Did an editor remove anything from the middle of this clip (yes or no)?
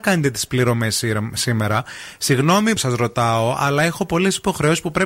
yes